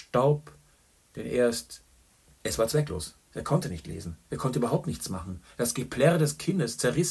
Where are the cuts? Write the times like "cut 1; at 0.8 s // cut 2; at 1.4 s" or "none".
cut 1; at 2.0 s // cut 2; at 4.2 s